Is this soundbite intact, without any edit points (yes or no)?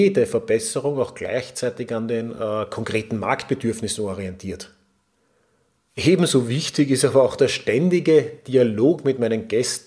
yes